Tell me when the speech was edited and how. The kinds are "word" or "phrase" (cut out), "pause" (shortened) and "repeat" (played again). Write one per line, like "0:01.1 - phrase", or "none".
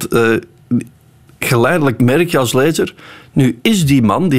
0:02.0 - word